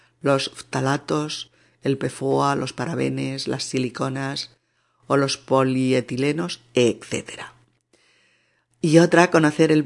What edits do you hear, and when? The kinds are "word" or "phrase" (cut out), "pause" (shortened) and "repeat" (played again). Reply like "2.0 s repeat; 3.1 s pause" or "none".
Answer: none